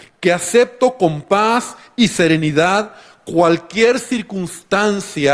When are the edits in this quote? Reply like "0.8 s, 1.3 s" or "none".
none